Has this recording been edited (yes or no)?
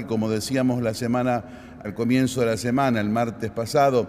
yes